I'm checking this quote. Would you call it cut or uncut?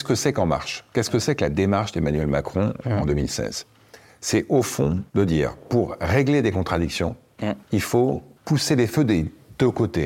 cut